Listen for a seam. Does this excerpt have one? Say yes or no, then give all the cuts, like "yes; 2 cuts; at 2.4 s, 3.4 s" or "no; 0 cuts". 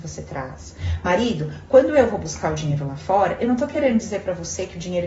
no; 0 cuts